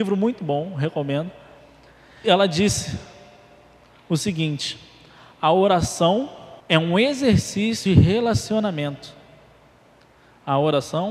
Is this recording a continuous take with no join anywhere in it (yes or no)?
no